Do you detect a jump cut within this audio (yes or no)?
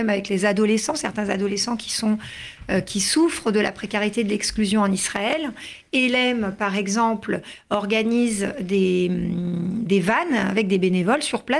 no